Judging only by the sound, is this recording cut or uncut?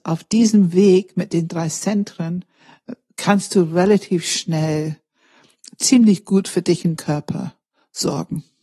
cut